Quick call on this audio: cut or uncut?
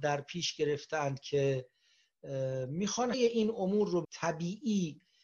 cut